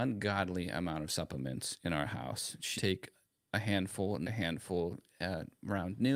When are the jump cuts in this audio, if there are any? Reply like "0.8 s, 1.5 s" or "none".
2.8 s, 4.2 s